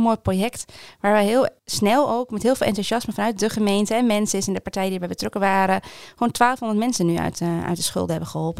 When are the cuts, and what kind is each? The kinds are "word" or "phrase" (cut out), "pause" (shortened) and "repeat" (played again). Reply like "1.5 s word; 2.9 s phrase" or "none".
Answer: 1.6 s pause